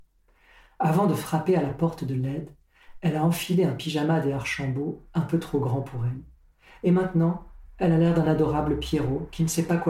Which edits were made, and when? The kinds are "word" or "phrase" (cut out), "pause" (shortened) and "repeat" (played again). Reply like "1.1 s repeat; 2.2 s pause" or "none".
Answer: none